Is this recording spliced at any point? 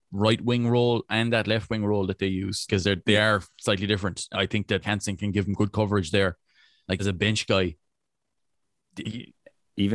yes; 6 cuts; at 2.7 s, 3.0 s, 4.3 s, 4.8 s, 7.0 s, 9.0 s

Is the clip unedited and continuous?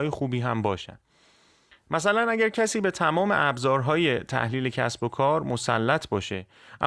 yes; 0 cuts

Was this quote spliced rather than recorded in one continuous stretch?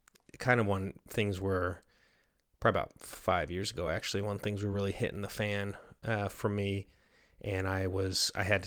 no; 0 cuts

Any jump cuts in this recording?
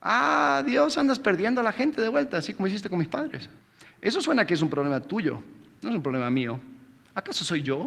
yes; 1 cut; at 3.6 s

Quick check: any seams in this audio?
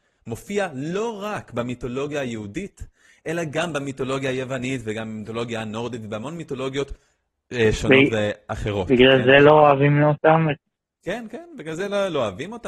no; 0 cuts

